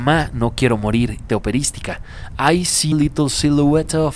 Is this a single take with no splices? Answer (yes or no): no